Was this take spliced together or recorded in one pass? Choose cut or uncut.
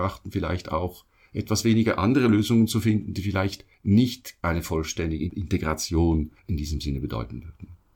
uncut